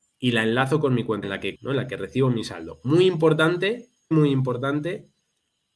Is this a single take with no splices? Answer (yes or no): no